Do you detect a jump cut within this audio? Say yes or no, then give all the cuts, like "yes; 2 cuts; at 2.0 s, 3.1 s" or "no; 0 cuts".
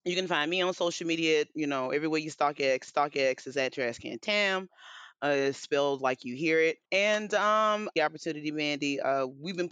yes; 3 cuts; at 2.9 s, 6.8 s, 8.0 s